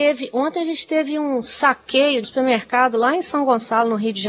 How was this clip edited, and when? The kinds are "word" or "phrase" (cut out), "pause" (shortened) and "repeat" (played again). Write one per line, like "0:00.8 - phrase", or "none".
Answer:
0:02.2 - word